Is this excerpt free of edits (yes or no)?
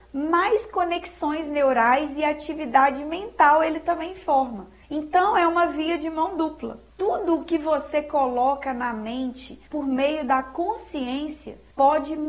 yes